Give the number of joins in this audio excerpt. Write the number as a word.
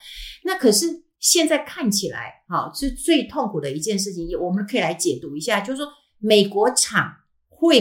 zero